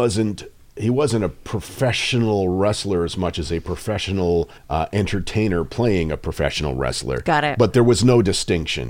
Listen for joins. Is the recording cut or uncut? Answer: cut